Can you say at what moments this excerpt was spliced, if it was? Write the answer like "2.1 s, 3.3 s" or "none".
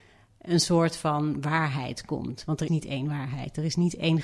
2.7 s

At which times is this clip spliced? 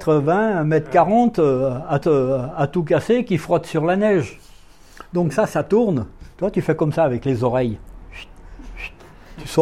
2.0 s

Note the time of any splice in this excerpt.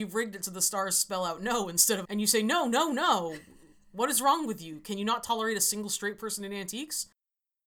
2.0 s

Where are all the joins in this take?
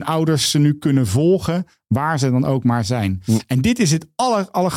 none

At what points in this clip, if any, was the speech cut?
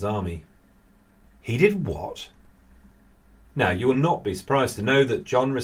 none

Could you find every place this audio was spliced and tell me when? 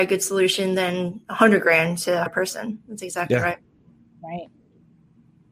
2.3 s

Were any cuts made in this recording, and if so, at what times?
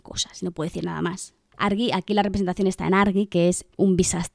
none

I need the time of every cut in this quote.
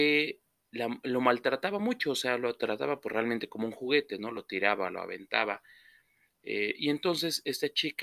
none

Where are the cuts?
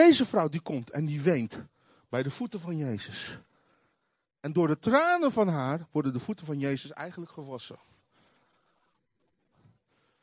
none

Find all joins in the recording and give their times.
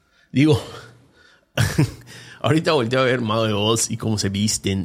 none

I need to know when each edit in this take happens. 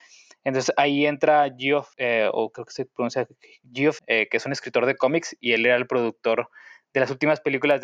1.9 s, 4.0 s

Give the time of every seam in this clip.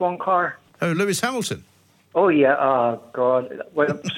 none

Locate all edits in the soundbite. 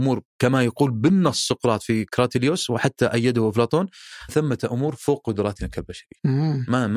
4.3 s

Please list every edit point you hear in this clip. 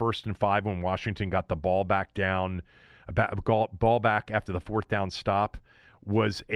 none

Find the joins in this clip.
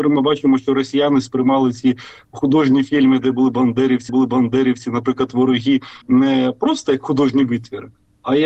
4.1 s, 6.0 s

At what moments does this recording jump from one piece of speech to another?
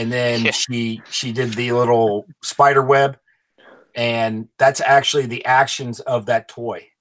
none

